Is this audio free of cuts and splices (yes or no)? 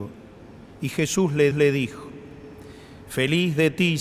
no